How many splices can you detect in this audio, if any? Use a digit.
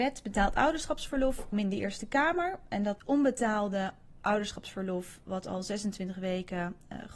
2